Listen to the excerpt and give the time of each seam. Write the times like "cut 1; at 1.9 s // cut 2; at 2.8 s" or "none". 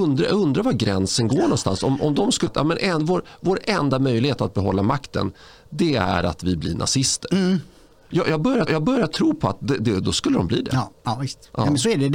cut 1; at 2.5 s // cut 2; at 8.7 s // cut 3; at 11.0 s